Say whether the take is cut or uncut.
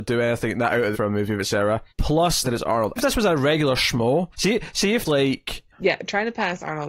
cut